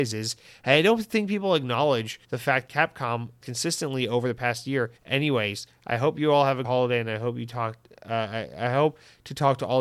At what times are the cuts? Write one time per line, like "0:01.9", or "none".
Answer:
0:02.2
0:02.7
0:03.4
0:05.0
0:06.6